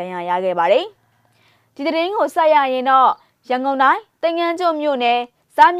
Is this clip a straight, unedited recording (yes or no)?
yes